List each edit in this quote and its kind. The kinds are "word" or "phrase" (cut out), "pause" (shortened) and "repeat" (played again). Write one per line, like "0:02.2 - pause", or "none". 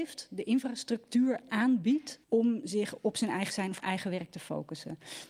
0:02.2 - pause
0:03.5 - word
0:03.8 - word